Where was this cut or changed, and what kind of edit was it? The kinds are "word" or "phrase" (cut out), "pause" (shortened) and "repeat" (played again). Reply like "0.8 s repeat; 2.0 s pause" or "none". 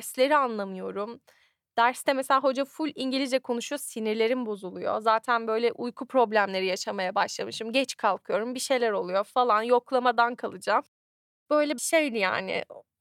11.8 s word